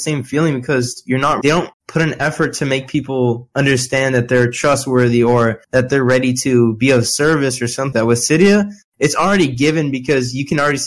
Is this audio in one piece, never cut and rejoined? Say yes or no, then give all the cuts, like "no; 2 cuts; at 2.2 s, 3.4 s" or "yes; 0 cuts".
no; 4 cuts; at 1.4 s, 1.7 s, 5.6 s, 7.9 s